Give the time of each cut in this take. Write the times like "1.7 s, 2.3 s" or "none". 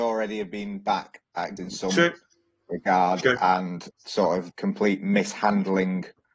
1.6 s, 3.9 s, 4.5 s

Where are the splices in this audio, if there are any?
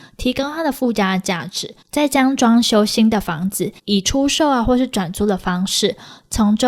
1.8 s, 3.8 s

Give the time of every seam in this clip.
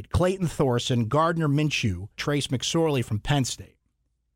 2.2 s

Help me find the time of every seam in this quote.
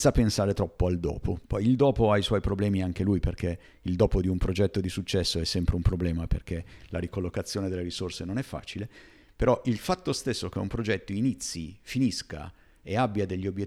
1.4 s

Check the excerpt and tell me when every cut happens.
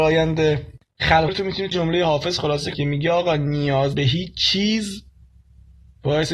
1.3 s, 1.7 s, 2.7 s, 3.9 s

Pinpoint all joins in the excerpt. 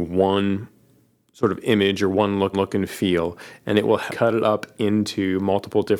2.5 s, 4.1 s

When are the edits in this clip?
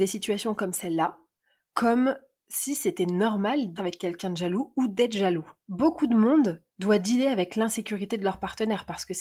3.8 s, 5.6 s, 6.7 s

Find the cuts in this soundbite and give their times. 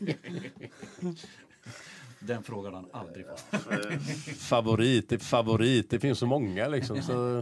5.2 s

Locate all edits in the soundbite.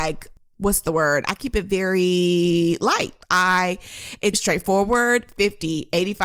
3.2 s, 4.3 s

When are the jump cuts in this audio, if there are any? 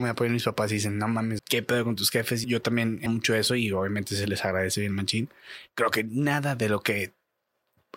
1.4 s, 2.4 s, 3.1 s

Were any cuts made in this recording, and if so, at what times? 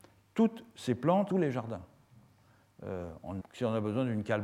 1.3 s, 3.4 s

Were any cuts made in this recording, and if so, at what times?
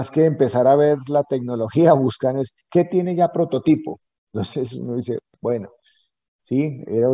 none

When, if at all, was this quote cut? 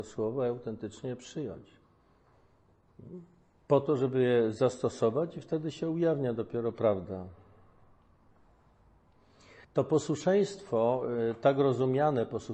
9.6 s

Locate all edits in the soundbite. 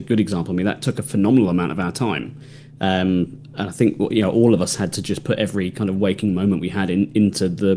none

